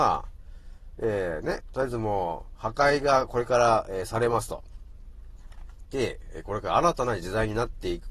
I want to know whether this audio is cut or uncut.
uncut